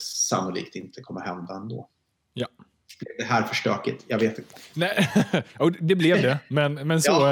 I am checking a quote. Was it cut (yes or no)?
no